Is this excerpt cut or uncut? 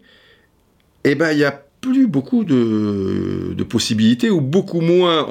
uncut